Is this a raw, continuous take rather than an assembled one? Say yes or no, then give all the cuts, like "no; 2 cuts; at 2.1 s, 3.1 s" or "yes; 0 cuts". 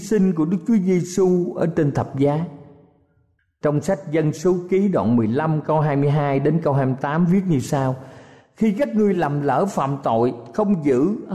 yes; 0 cuts